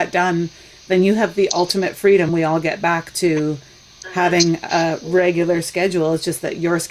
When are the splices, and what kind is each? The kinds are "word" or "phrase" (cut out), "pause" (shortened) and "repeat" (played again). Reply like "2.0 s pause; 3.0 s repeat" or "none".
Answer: 2.3 s word

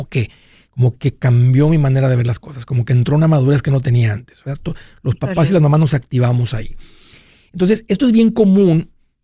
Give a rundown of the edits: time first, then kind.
none

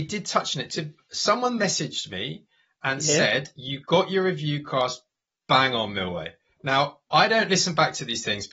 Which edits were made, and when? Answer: none

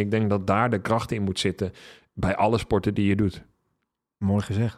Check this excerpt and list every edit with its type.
none

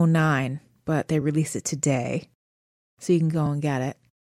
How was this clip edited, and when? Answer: none

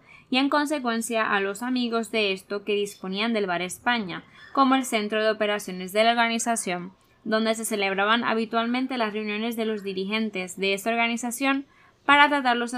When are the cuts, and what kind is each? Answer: none

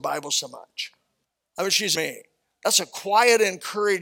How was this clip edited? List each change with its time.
1.2 s pause; 2.0 s phrase

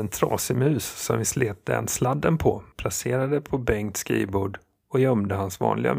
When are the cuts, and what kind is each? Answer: none

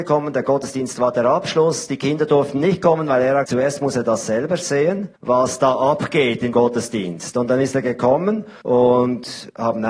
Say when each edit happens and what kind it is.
3.5 s word; 5.2 s pause; 6.5 s word; 8.6 s pause

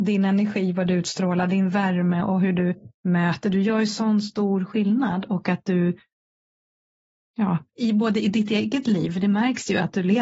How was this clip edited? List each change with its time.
none

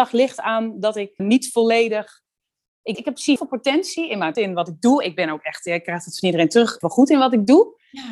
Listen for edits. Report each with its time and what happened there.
1.2 s word; 2.9 s word; 3.4 s word; 4.3 s word; 6.8 s word

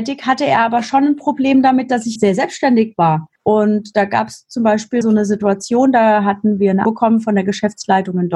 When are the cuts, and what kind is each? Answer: 2.2 s word; 3.4 s pause; 5.0 s word; 6.8 s word

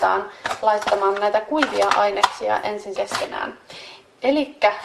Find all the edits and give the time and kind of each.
3.0 s word

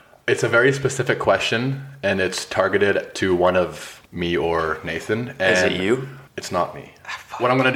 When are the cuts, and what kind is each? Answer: 4.1 s pause; 6.3 s pause

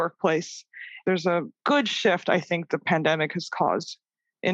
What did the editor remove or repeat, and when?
1.6 s pause

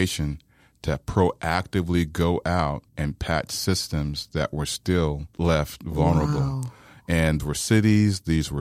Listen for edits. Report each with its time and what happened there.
2.9 s pause; 5.3 s pause; 7.4 s word

